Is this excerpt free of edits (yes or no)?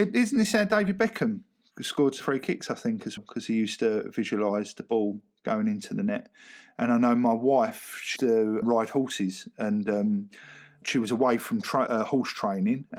no